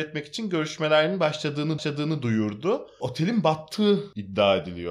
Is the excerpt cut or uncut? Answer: cut